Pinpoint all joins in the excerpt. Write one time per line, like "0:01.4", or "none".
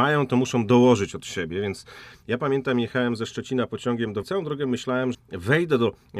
0:04.2
0:05.1